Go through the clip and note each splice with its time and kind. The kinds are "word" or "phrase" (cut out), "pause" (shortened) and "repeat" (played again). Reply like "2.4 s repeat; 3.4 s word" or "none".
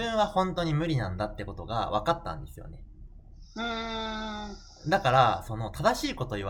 none